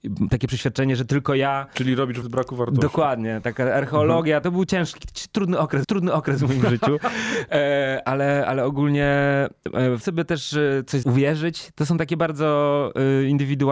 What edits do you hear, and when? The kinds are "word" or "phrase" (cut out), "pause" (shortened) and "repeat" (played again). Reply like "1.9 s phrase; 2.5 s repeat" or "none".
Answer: 2.2 s word; 4.4 s word; 5.8 s repeat; 8.0 s word; 10.0 s word; 11.0 s phrase